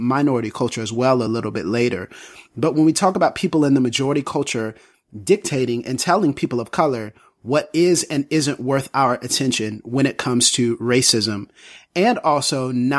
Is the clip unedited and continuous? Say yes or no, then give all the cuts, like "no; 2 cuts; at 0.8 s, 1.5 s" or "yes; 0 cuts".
yes; 0 cuts